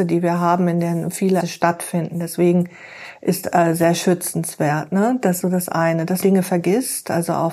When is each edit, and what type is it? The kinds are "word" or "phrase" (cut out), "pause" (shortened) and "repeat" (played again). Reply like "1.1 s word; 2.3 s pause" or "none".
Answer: 1.4 s word; 3.4 s word; 5.4 s word; 6.2 s word